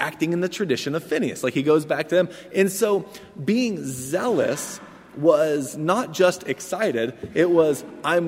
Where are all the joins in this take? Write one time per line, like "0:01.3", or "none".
none

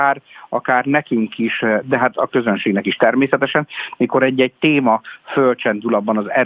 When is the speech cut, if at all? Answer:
0:01.8

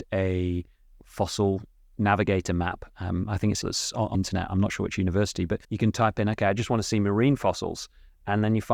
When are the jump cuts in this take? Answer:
0:03.6
0:04.1
0:05.6

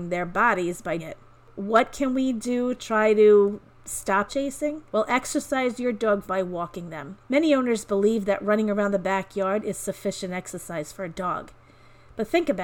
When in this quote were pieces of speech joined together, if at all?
0:01.0
0:02.8
0:04.3
0:04.9
0:06.2
0:07.2

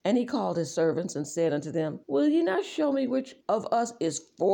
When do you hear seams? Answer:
0:02.0
0:03.4

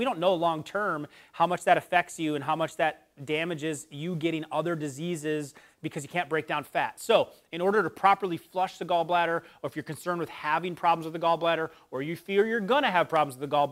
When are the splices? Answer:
none

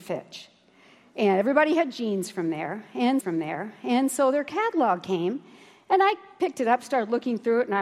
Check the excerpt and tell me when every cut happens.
0:03.2

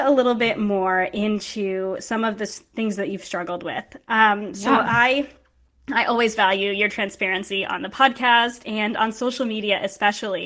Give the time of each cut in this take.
none

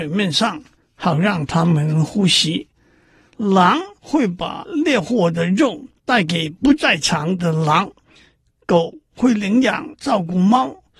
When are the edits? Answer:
none

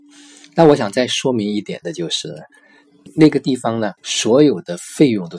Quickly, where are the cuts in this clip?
0:03.1
0:04.0

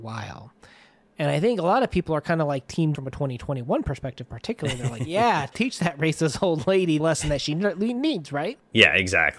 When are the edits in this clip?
0:02.9
0:05.5
0:07.0

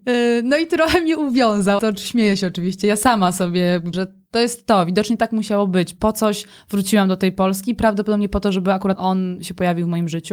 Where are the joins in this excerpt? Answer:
0:01.8
0:03.9
0:09.0

